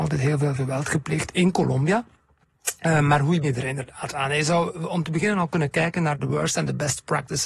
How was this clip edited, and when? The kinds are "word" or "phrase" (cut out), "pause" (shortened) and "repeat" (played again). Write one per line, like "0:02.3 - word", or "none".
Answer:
0:03.4 - word

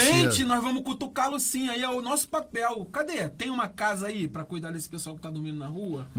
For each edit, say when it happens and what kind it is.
none

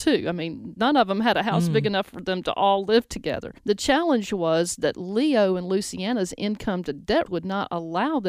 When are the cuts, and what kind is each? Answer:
0:03.6 - pause
0:07.3 - word

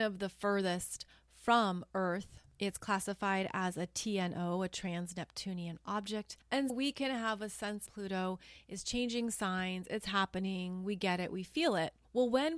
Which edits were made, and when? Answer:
0:06.7 - word
0:07.9 - phrase

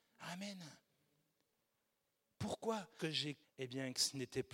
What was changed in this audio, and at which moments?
0:03.0 - word
0:03.4 - word

